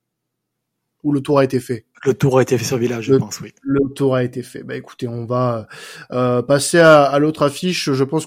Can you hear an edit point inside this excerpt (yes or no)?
yes